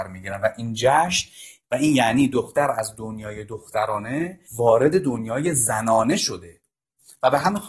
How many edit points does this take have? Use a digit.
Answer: 1